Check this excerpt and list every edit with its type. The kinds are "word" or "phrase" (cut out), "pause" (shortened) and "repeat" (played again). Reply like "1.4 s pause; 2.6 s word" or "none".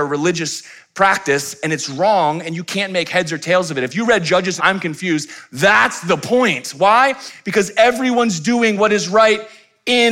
4.6 s phrase